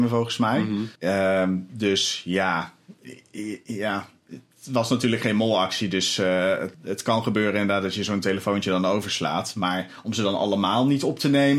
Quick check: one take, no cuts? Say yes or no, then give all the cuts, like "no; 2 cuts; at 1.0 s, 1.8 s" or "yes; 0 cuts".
no; 2 cuts; at 1.0 s, 6.7 s